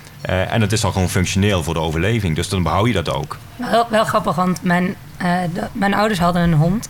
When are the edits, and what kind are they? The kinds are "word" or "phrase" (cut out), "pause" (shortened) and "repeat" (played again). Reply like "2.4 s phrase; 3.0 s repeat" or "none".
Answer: none